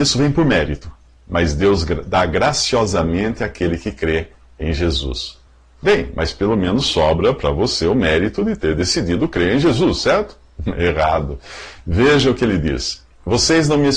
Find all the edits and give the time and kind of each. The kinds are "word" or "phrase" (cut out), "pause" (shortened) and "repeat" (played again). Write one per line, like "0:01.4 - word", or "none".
none